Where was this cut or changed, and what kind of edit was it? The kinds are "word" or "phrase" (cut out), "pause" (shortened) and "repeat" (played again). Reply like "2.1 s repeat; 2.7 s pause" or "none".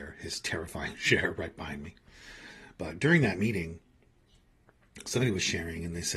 none

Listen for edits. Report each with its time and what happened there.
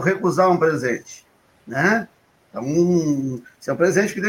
none

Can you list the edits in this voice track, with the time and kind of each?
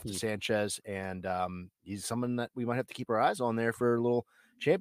1.7 s pause

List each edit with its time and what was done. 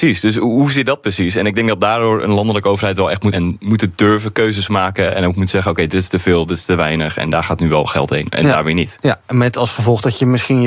3.3 s word

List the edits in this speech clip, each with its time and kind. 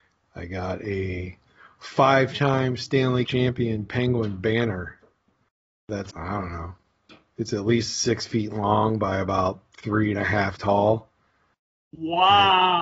3.2 s word; 6.1 s word; 10.6 s word

